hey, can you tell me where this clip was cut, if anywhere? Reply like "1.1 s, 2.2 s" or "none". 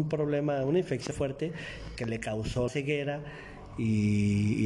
1.1 s, 2.7 s